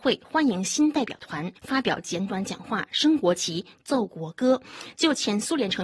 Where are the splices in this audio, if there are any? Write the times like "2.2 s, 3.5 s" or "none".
1.6 s